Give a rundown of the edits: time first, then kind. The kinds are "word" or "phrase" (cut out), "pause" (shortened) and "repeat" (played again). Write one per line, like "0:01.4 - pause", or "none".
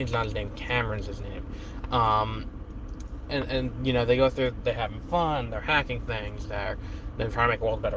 0:04.6 - word